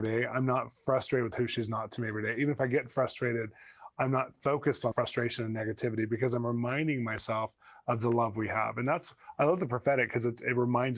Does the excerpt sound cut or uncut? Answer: cut